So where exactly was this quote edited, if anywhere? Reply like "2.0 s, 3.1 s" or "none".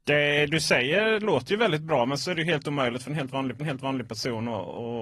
2.2 s, 3.6 s